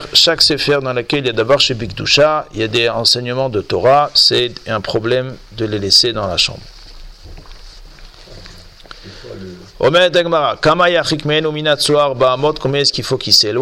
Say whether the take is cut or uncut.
uncut